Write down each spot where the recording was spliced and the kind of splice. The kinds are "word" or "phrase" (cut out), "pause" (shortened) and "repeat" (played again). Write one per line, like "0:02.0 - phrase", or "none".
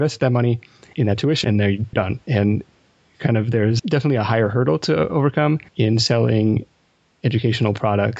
0:00.9 - word
0:01.4 - word
0:01.9 - word
0:02.2 - pause
0:03.8 - word
0:05.7 - pause